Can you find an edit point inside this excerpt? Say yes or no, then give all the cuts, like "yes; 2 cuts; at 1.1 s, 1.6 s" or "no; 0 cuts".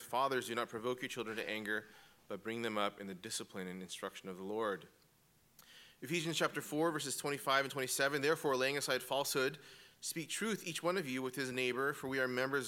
no; 0 cuts